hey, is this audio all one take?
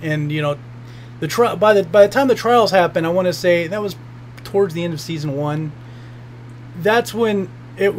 yes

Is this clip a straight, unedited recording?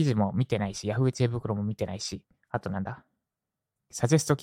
yes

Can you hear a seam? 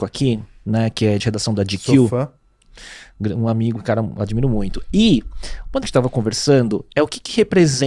yes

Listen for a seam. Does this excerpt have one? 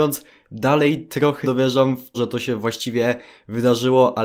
yes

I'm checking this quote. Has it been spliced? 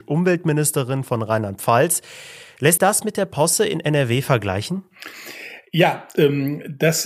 yes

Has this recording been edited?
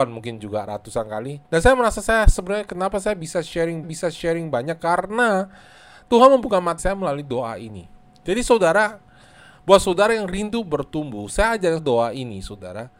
yes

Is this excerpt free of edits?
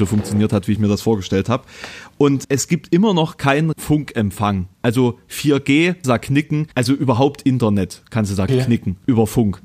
no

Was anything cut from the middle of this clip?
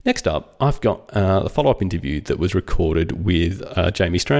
no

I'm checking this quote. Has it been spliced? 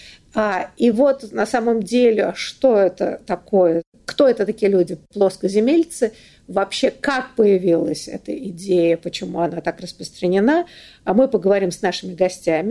no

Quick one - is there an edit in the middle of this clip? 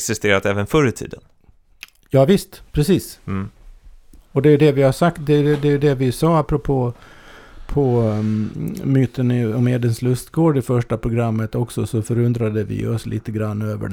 no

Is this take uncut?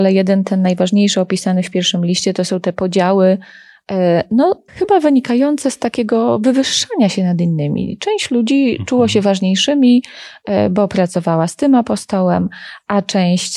no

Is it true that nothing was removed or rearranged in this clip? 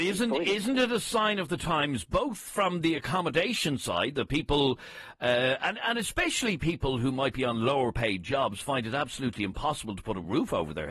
yes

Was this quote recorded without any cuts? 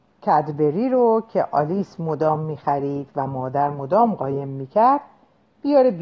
yes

